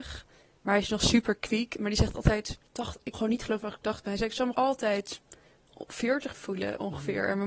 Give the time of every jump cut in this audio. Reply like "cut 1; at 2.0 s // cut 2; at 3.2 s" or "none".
cut 1; at 2.7 s // cut 2; at 3.1 s // cut 3; at 4.5 s // cut 4; at 6.3 s